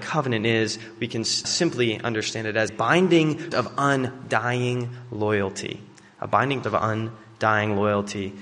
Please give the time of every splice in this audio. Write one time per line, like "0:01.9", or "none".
0:01.4
0:02.7
0:03.5
0:06.6